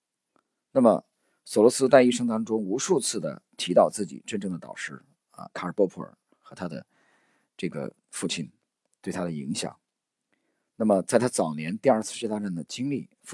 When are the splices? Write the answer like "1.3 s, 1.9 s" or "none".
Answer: none

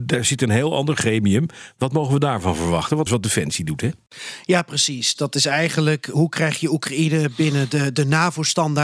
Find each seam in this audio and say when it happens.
3.1 s

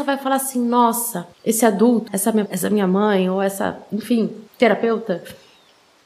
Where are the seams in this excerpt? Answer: 1.3 s, 2.1 s, 2.5 s, 4.5 s

